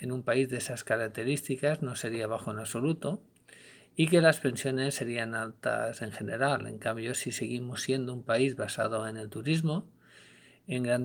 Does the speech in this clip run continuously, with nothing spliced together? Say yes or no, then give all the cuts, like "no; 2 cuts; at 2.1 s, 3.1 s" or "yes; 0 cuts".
yes; 0 cuts